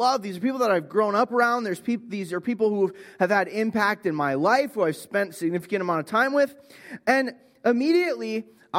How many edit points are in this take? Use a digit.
0